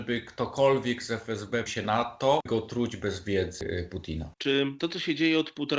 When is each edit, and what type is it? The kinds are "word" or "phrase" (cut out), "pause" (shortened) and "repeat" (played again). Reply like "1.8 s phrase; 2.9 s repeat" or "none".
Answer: 1.7 s word; 2.5 s word; 4.3 s pause